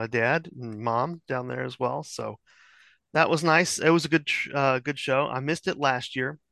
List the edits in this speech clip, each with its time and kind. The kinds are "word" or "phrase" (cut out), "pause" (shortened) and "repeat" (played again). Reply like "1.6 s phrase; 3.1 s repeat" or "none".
none